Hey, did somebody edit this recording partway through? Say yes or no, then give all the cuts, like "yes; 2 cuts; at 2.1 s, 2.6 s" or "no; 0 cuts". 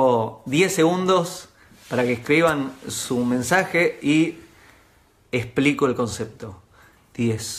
no; 0 cuts